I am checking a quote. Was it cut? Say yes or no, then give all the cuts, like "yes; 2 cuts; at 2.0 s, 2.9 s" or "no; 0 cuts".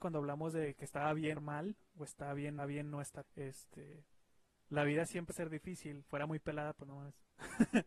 yes; 5 cuts; at 1.3 s, 2.6 s, 3.2 s, 5.3 s, 6.1 s